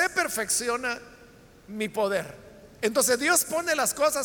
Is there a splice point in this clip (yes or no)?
no